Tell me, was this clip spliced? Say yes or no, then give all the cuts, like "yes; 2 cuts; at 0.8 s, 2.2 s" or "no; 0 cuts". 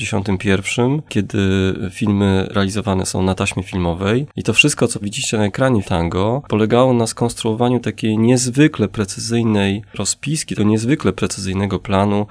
yes; 3 cuts; at 5.0 s, 5.8 s, 10.6 s